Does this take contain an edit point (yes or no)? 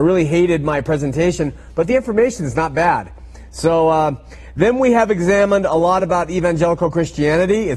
no